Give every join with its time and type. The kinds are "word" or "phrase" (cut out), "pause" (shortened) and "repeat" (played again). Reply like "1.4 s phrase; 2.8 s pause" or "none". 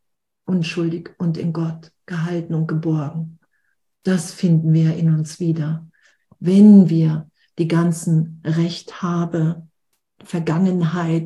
none